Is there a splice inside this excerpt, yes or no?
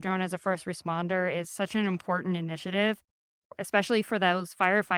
no